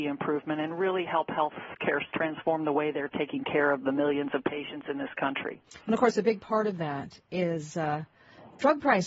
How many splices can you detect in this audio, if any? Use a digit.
1